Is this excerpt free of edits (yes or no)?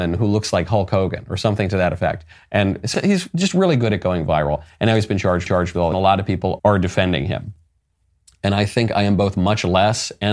no